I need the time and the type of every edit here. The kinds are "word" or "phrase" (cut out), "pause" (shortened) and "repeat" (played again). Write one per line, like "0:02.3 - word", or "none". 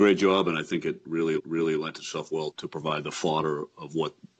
0:01.4 - repeat
0:02.5 - word